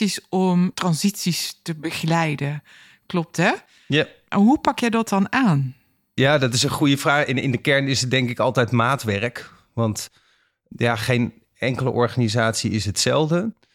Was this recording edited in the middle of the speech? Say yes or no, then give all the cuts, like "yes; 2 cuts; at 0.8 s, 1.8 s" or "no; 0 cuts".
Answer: no; 0 cuts